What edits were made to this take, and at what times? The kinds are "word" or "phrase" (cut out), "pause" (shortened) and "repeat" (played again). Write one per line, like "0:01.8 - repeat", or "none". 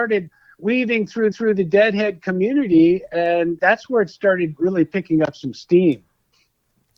0:01.3 - repeat
0:03.6 - word